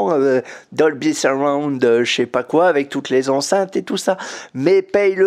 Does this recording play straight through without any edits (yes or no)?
yes